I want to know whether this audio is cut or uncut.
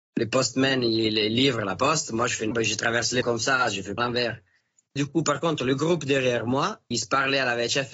cut